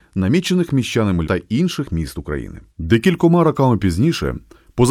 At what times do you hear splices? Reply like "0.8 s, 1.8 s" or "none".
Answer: 1.2 s, 2.7 s

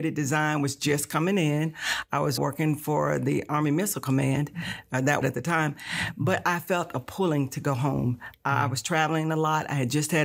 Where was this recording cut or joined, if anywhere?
2.4 s, 5.2 s

